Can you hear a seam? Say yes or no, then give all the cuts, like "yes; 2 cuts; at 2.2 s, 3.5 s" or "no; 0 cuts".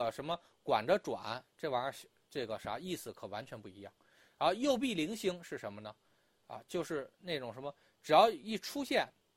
no; 0 cuts